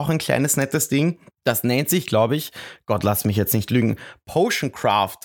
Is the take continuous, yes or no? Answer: no